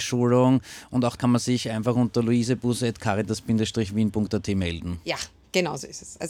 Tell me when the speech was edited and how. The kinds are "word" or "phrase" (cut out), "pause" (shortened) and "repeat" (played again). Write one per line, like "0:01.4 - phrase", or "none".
0:01.2 - word